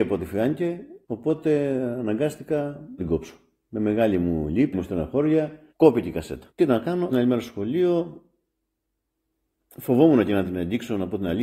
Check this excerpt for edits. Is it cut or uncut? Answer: cut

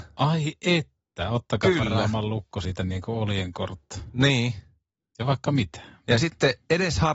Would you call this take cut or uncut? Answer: uncut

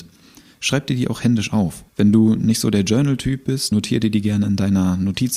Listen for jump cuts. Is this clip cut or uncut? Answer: cut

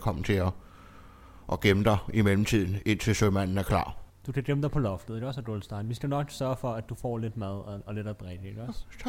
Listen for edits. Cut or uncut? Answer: cut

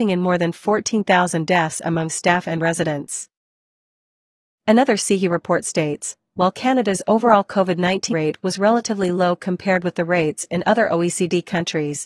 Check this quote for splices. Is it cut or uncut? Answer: cut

